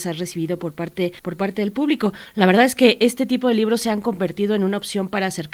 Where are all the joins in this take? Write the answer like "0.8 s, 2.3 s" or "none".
1.2 s